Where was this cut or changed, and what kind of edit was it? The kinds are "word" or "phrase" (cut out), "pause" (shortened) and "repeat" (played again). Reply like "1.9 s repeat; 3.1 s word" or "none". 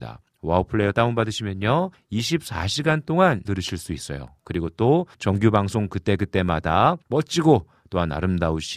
1.9 s pause; 3.4 s word; 5.1 s pause; 7.0 s pause